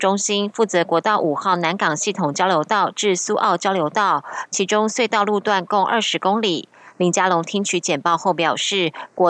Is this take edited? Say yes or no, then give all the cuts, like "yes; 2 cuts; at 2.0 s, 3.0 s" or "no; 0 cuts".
no; 0 cuts